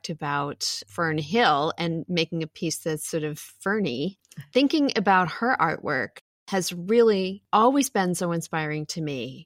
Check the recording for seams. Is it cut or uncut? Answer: uncut